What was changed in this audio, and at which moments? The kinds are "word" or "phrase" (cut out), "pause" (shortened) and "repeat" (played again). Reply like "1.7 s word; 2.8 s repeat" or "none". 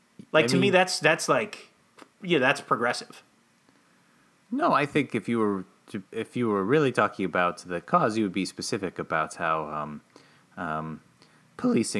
6.1 s pause

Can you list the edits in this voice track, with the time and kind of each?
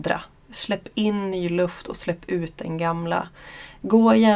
none

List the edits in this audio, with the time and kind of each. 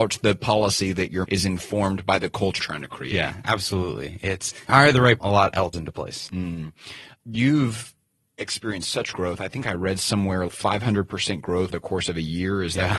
1.2 s word; 2.6 s word; 4.7 s word; 5.2 s word; 5.7 s word; 9.1 s word; 10.5 s word; 11.7 s word

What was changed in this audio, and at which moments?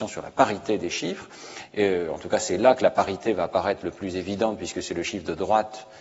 none

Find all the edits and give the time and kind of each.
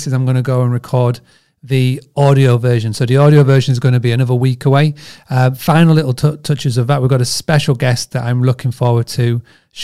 none

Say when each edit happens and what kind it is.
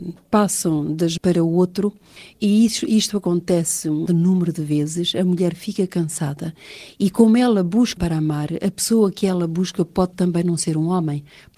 1.2 s phrase; 4.1 s word; 8.0 s word

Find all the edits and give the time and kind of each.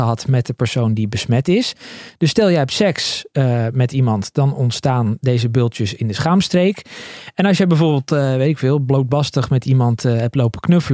none

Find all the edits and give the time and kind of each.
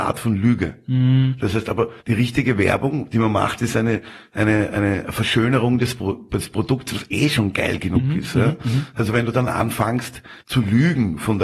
2.0 s pause; 10.4 s pause

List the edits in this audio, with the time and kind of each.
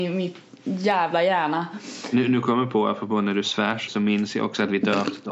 3.9 s word

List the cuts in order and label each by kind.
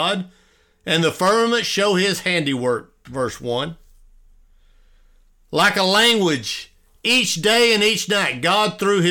none

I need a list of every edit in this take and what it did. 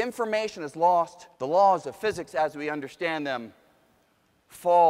1.3 s pause

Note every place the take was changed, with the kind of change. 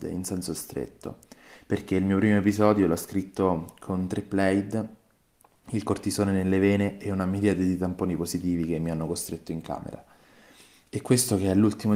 none

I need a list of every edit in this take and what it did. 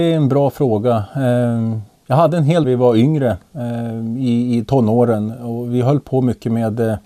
1.9 s pause; 2.6 s phrase

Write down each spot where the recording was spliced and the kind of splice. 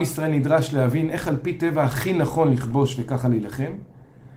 none

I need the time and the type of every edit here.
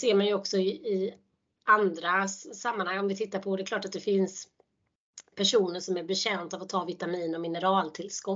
none

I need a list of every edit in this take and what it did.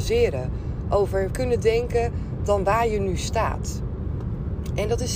1.3 s word

